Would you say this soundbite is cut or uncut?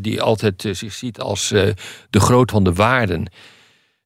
cut